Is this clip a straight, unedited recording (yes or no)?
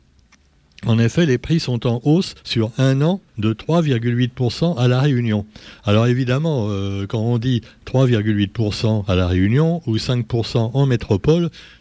no